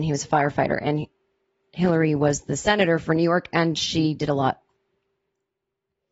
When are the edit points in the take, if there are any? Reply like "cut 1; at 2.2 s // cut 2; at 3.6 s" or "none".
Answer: none